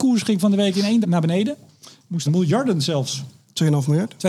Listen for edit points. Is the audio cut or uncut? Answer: cut